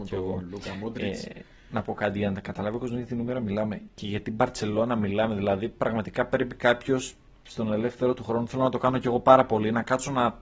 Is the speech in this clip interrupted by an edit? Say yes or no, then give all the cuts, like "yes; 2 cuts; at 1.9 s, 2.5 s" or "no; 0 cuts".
no; 0 cuts